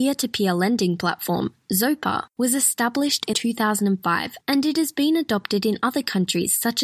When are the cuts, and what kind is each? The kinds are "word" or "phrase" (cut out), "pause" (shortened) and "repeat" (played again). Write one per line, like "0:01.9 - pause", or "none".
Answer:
0:03.3 - phrase